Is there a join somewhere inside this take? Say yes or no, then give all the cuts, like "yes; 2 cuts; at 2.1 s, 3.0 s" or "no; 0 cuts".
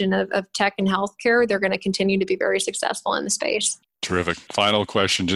no; 0 cuts